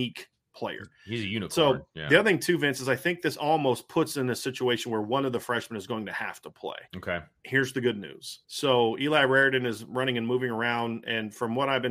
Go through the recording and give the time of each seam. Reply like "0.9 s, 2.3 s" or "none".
6.9 s, 8.4 s